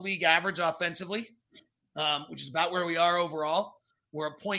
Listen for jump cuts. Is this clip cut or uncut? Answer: cut